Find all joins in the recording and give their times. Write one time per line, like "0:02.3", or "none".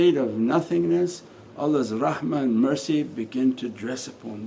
none